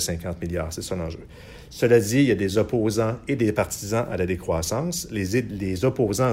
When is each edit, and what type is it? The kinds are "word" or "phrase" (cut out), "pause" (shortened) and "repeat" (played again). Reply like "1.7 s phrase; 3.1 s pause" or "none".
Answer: none